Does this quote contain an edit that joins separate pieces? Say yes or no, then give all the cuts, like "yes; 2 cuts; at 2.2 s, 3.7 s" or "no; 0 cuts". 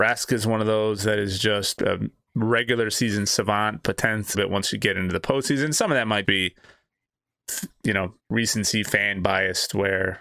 yes; 4 cuts; at 1.8 s, 4.3 s, 6.2 s, 8.2 s